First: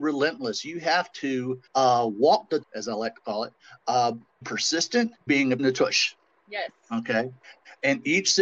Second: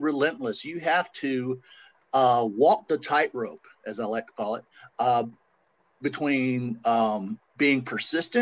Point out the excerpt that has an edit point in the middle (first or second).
first